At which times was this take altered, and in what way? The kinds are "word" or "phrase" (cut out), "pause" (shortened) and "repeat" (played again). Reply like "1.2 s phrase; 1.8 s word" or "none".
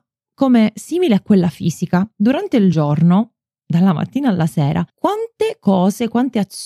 none